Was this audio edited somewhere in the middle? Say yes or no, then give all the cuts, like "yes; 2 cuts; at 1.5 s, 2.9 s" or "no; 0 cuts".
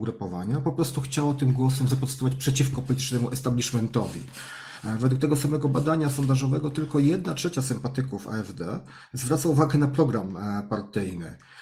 no; 0 cuts